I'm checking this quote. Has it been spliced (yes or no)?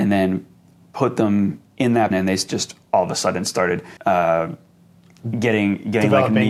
yes